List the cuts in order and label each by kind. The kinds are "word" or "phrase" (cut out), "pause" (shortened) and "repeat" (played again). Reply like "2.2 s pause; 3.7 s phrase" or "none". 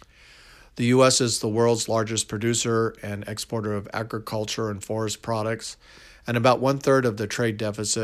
none